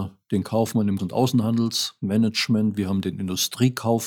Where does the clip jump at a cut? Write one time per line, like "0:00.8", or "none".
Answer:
0:01.0